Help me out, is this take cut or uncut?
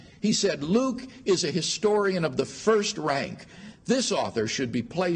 uncut